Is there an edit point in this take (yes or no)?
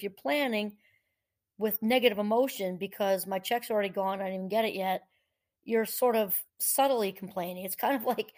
yes